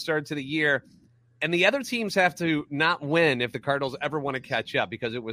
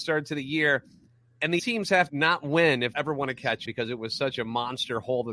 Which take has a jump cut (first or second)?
second